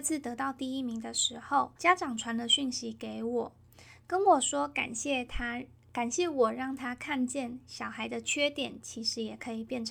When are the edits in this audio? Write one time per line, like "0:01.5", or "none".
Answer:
0:01.8

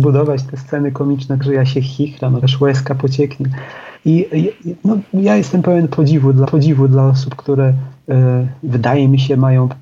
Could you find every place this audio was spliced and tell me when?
0:01.4
0:02.4
0:04.0
0:06.4

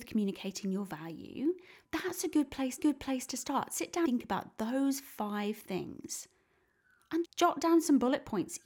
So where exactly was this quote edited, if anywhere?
0:01.8
0:02.8
0:04.0
0:07.2

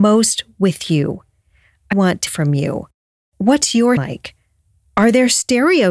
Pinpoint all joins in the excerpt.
0:01.9
0:02.3
0:04.0

